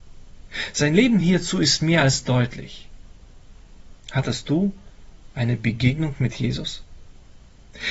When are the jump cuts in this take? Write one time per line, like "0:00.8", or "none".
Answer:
none